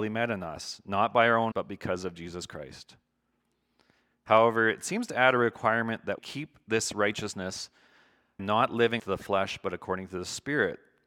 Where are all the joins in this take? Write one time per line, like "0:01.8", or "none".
0:01.5
0:06.2
0:08.4
0:09.0